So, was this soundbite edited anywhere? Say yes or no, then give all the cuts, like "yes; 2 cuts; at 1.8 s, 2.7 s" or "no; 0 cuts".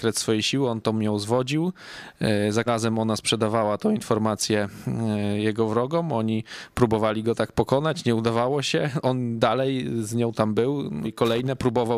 yes; 2 cuts; at 2.7 s, 11.0 s